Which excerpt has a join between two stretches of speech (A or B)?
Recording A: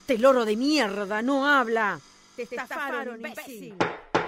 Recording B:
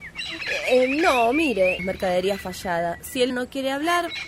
B